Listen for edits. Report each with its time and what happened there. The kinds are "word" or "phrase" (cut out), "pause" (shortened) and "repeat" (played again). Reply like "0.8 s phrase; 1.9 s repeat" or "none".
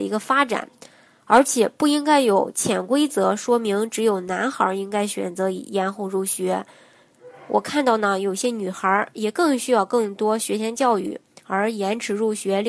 none